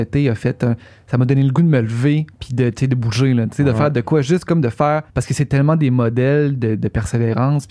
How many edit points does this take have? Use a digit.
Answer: 2